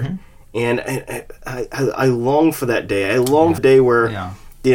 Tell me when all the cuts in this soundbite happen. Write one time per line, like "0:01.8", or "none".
0:03.6